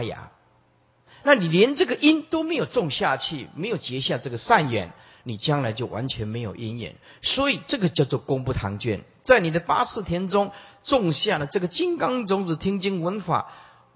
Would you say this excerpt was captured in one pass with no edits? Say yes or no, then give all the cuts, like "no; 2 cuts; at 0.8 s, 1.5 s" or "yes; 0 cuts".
yes; 0 cuts